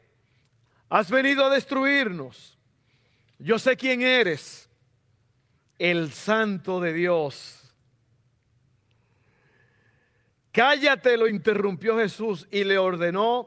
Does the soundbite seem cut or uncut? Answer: uncut